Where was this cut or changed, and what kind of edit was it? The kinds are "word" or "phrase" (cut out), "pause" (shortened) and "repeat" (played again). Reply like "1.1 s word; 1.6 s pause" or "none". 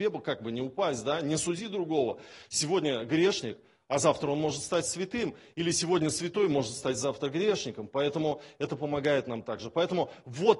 none